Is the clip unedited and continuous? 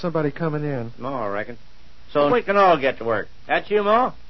no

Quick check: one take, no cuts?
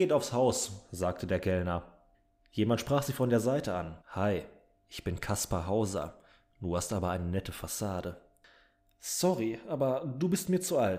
no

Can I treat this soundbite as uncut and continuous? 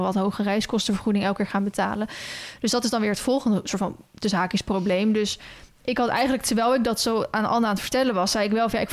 yes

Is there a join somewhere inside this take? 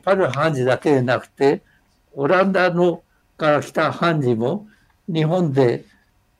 no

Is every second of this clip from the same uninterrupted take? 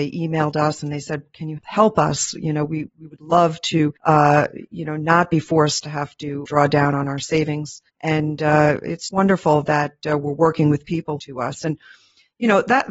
no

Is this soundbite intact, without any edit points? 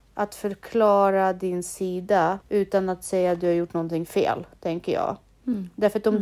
no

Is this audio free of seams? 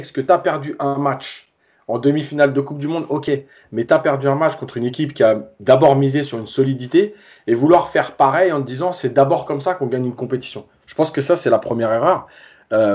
yes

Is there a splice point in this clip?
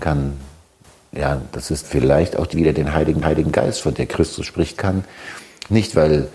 yes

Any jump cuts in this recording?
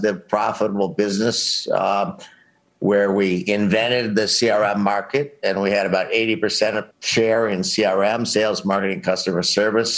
yes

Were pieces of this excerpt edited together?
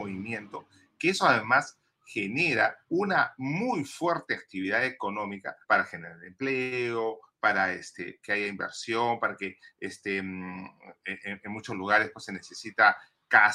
yes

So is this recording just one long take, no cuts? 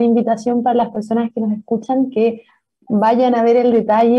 yes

